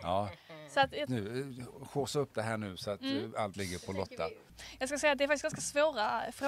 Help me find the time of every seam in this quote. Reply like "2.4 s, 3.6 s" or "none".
1.1 s, 2.3 s, 3.5 s